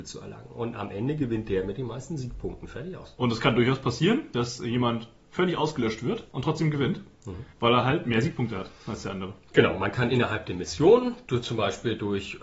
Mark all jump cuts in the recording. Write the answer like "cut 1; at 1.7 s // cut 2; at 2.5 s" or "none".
cut 1; at 7.5 s // cut 2; at 8.8 s